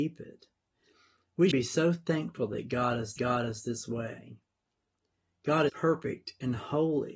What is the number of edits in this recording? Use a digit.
3